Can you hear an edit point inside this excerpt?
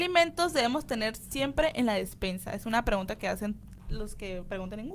no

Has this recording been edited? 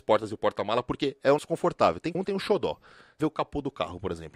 yes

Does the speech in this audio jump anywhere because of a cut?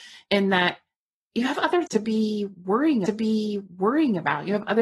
yes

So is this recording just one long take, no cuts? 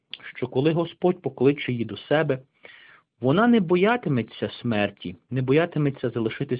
yes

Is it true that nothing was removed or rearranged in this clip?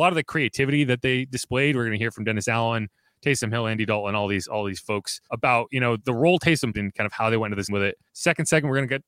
no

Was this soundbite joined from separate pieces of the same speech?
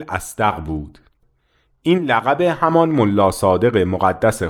no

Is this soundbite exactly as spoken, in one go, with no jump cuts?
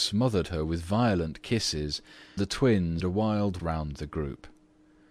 no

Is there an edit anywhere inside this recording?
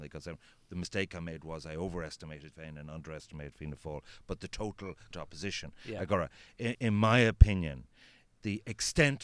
yes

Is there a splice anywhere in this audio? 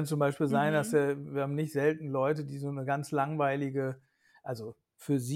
no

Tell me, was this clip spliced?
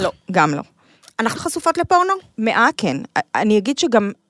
yes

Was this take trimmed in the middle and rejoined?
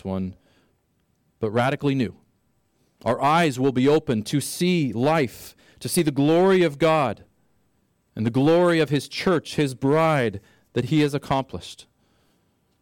no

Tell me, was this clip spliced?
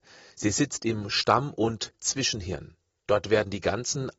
no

